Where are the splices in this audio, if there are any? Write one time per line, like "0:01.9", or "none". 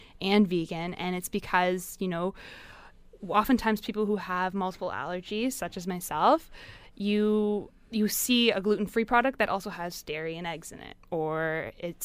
none

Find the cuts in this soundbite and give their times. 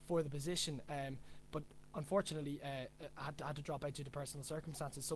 none

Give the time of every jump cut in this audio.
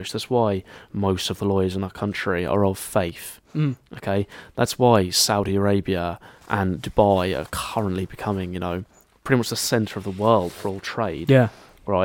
none

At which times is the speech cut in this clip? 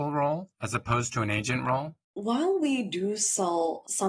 0:02.1

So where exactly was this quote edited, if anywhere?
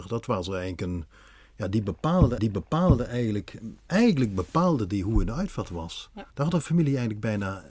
0:02.4
0:06.3

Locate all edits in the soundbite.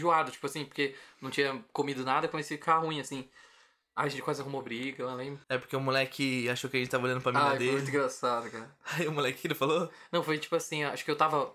0:05.4

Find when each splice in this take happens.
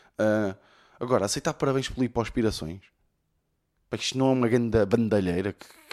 none

